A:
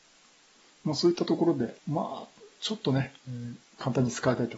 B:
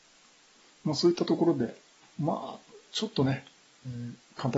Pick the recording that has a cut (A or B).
A